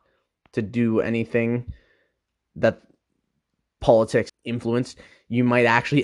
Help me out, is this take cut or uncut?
cut